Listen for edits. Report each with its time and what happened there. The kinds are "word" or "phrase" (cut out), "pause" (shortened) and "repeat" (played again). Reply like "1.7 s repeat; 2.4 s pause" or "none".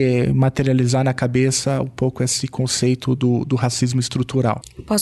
none

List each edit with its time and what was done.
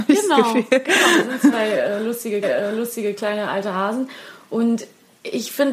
1.5 s word; 2.4 s repeat

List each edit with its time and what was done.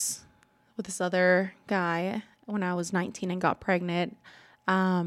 none

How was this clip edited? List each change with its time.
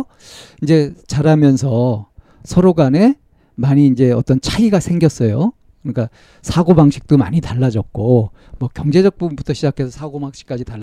none

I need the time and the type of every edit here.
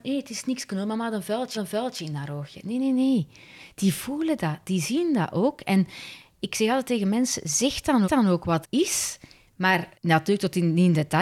1.5 s repeat; 8.0 s repeat; 8.6 s word; 9.9 s pause

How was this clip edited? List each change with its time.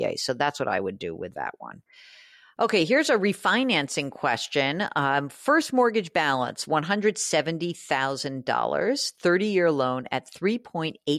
none

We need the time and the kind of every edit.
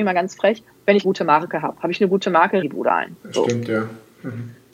1.0 s word; 2.6 s phrase; 3.2 s pause

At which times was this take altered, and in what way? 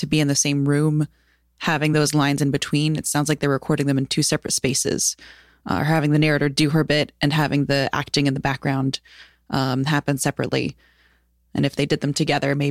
none

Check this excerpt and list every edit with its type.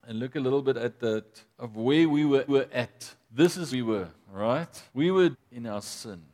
1.5 s pause; 2.5 s repeat; 3.7 s word; 4.9 s pause; 5.3 s word

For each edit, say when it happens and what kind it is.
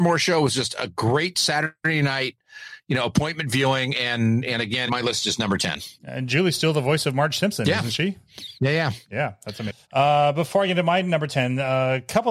4.9 s phrase; 5.9 s pause; 8.6 s pause; 9.8 s pause

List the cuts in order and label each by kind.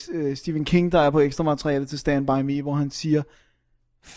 none

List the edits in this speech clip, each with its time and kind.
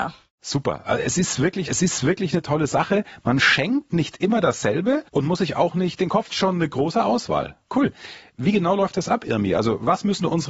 1.7 s repeat; 5.1 s pause; 6.3 s phrase

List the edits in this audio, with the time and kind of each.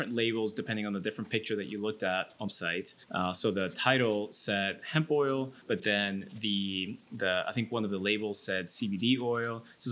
3.0 s pause; 5.6 s pause

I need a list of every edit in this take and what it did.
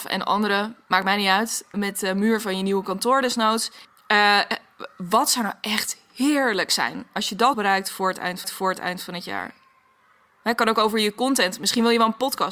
1.7 s word; 3.8 s pause; 7.5 s word; 8.4 s repeat

